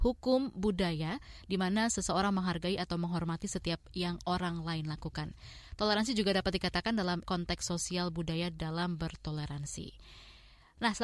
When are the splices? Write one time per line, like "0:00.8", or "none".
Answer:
0:07.2